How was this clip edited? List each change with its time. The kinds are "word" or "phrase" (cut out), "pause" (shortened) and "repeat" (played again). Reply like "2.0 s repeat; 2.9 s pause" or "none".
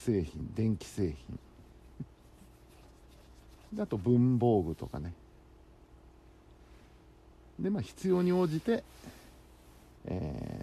none